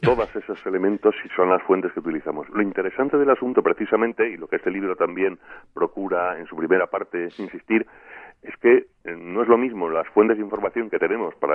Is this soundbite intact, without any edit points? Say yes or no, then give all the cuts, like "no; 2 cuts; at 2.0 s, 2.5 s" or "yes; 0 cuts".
yes; 0 cuts